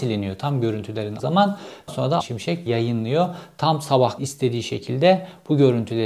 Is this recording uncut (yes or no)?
no